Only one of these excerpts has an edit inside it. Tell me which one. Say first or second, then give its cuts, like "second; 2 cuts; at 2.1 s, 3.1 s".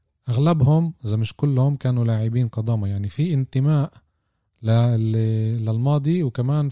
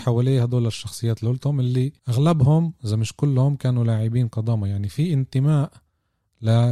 second; 1 cut; at 2.0 s